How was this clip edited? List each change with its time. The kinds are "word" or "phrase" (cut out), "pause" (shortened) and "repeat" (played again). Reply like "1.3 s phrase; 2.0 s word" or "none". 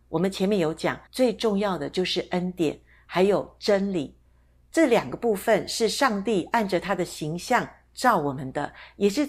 1.1 s pause